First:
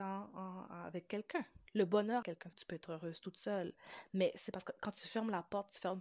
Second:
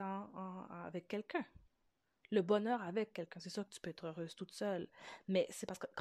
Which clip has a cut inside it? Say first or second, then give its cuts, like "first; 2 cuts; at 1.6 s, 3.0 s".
first; 3 cuts; at 1.7 s, 2.2 s, 2.5 s